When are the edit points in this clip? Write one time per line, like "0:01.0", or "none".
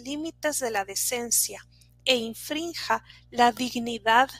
none